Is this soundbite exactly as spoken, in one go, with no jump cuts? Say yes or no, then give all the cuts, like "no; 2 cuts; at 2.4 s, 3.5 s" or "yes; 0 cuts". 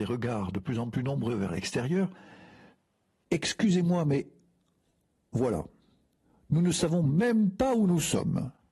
yes; 0 cuts